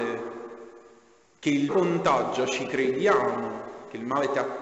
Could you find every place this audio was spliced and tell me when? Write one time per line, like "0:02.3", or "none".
0:01.7